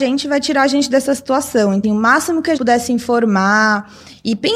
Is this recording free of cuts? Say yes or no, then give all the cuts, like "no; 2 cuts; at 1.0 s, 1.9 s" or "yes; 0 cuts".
no; 2 cuts; at 1.8 s, 2.6 s